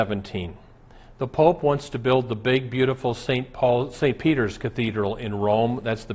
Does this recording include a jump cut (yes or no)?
no